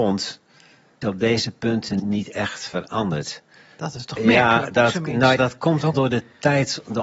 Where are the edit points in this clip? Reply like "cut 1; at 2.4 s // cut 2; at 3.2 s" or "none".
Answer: cut 1; at 1.0 s // cut 2; at 2.0 s // cut 3; at 4.2 s // cut 4; at 5.4 s // cut 5; at 5.9 s